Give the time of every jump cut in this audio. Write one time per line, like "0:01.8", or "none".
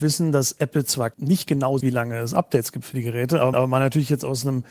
0:01.1
0:01.8
0:03.5